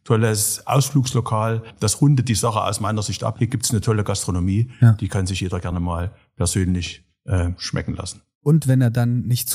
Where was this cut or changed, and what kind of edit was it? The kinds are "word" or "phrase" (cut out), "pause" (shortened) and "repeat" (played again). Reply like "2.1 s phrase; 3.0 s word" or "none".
none